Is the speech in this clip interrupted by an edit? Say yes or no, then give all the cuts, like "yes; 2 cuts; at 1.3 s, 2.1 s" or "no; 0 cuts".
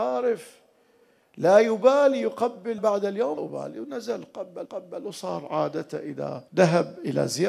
yes; 4 cuts; at 2.8 s, 3.4 s, 4.7 s, 6.5 s